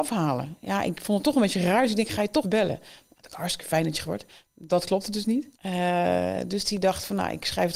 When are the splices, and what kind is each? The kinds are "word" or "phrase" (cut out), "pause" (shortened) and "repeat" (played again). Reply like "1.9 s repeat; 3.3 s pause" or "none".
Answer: 2.4 s word; 4.0 s word; 5.5 s pause